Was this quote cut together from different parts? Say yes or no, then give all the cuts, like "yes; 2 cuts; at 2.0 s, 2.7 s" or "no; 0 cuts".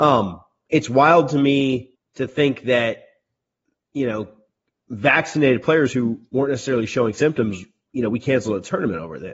yes; 1 cut; at 1.9 s